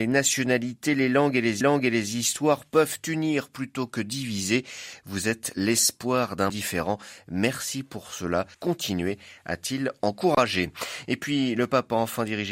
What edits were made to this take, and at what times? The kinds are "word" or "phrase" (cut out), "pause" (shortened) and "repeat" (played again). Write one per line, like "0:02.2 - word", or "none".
0:01.6 - repeat
0:06.5 - word
0:08.5 - pause